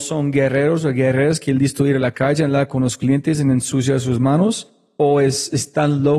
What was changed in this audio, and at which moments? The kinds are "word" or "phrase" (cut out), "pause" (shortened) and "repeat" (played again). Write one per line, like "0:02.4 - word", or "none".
none

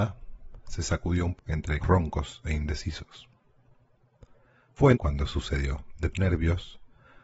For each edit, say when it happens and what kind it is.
0:01.4 - word
0:01.8 - word
0:04.9 - word
0:06.1 - word

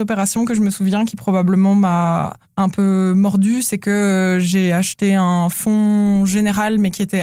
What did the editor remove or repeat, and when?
0:02.4 - pause

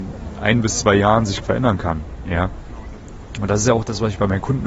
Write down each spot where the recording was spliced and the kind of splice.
0:01.4 - word

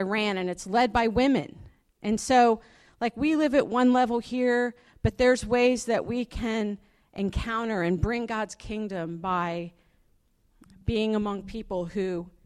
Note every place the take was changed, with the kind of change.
none

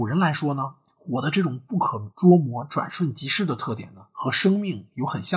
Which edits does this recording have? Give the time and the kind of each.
0:02.1 - pause

